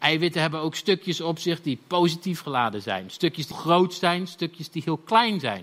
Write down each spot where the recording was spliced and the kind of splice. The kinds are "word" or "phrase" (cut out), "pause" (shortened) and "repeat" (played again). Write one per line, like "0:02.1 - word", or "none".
0:02.4 - phrase
0:03.5 - word

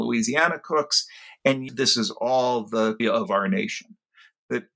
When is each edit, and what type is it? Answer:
0:01.7 - word
0:03.0 - word

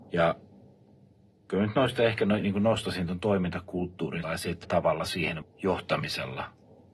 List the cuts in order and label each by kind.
0:04.2 - phrase
0:04.6 - word
0:05.4 - word

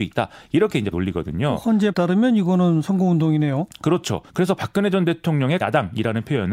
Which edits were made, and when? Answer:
0:00.9 - word
0:01.9 - word
0:04.3 - pause
0:05.6 - word

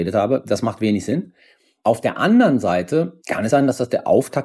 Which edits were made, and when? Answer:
0:03.5 - word

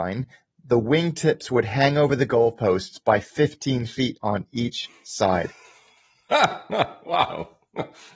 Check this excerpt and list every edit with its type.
none

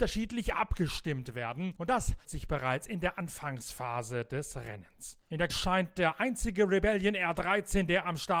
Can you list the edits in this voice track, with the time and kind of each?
0:02.2 - word
0:05.5 - word

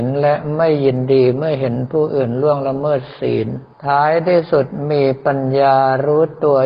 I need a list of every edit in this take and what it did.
0:03.7 - pause

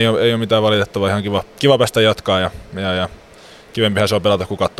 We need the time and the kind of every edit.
none

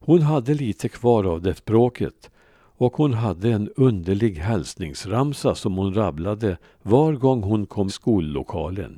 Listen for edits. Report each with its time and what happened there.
0:01.6 - word
0:07.9 - phrase

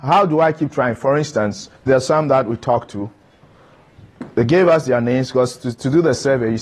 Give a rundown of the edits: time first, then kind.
0:01.8 - pause

